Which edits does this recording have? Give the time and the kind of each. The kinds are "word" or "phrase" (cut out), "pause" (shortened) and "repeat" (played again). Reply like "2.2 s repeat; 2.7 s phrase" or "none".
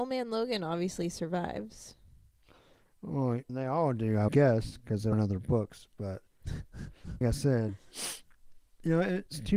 3.5 s word; 4.3 s word; 5.1 s word; 7.2 s word